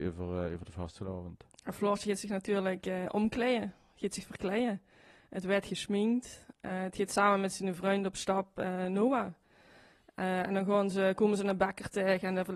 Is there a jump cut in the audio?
no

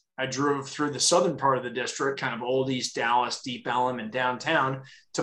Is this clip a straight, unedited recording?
yes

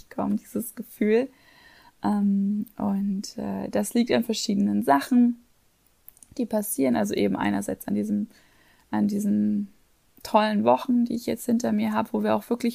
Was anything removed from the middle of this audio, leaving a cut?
no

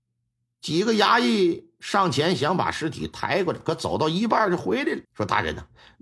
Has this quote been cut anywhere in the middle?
yes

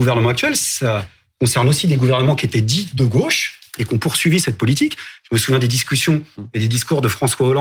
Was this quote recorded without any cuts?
yes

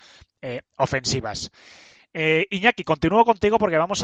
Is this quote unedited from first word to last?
yes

